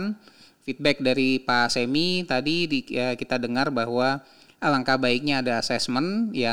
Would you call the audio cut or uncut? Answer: uncut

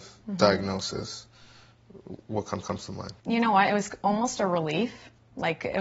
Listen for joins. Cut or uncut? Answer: cut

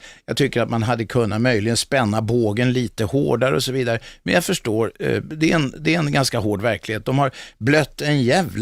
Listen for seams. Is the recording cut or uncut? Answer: uncut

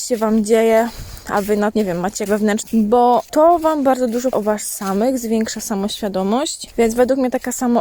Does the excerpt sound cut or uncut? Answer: cut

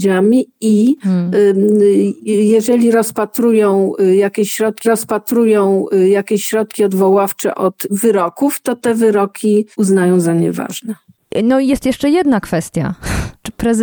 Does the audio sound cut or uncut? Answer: cut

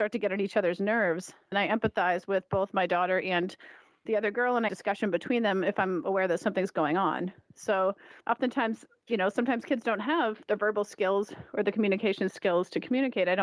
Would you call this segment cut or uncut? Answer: cut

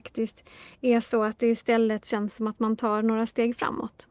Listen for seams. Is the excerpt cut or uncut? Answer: uncut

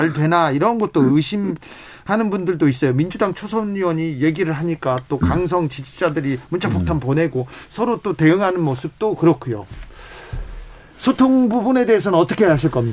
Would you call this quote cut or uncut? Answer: uncut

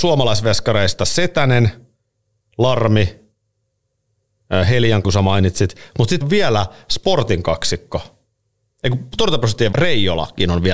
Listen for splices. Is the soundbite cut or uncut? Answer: cut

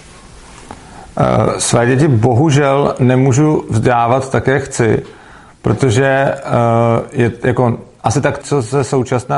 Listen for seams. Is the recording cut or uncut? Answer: cut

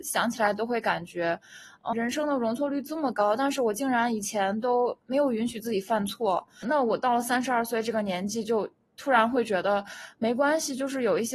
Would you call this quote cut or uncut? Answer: cut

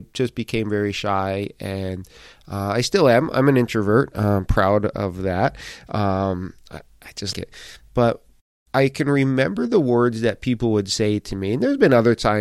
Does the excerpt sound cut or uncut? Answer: cut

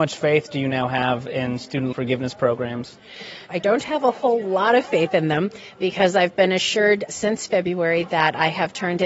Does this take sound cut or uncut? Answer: cut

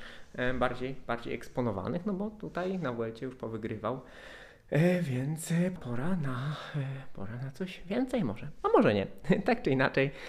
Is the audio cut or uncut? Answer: cut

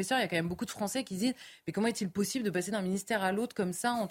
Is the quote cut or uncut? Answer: uncut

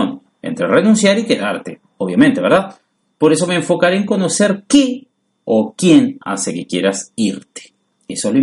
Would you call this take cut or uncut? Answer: uncut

